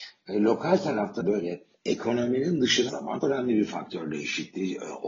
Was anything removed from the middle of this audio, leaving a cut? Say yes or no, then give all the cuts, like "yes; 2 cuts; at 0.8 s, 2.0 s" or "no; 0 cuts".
yes; 4 cuts; at 1.2 s, 1.7 s, 2.9 s, 3.2 s